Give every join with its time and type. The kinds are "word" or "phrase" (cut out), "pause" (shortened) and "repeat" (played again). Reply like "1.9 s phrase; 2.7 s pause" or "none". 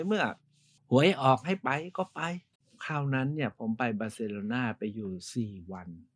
2.6 s pause

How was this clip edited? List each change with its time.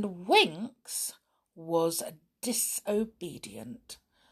none

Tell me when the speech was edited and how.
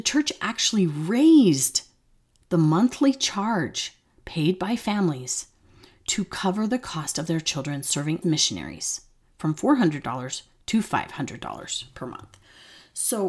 8.2 s word

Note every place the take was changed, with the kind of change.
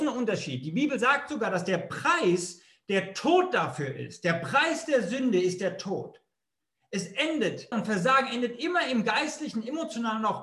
7.7 s word

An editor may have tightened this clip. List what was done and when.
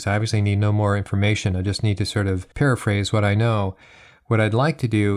2.5 s pause

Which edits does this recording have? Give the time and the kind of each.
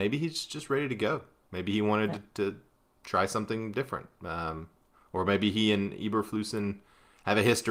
none

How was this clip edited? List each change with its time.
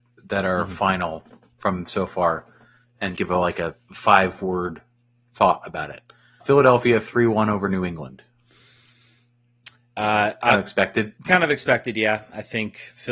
3.2 s word; 6.4 s word; 11.2 s word

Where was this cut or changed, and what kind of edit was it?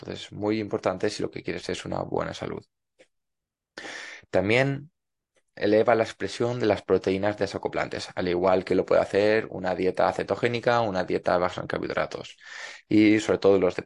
5.4 s word

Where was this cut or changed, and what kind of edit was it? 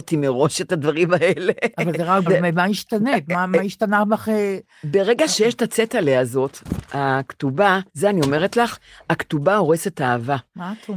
2.3 s word; 7.9 s pause

